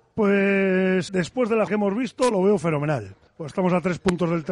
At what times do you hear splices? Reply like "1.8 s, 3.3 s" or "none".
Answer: 1.1 s, 1.7 s, 3.3 s